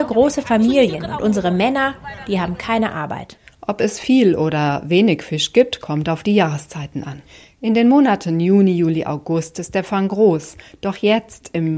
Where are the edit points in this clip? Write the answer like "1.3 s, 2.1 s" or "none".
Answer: none